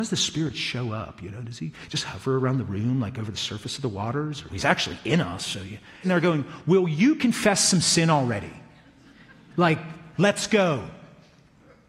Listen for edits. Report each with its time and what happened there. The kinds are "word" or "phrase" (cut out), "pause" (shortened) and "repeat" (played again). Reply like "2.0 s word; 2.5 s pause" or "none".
4.5 s word; 6.0 s phrase